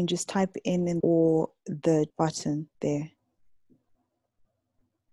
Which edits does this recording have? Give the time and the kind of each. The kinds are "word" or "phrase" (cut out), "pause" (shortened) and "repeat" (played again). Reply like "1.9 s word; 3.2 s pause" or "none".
1.0 s phrase; 2.1 s word; 2.7 s pause